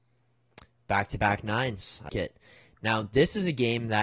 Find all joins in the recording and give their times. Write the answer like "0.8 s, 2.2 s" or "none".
2.1 s